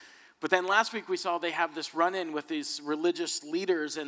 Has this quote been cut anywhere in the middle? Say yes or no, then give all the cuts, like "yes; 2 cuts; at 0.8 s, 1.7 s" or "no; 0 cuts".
no; 0 cuts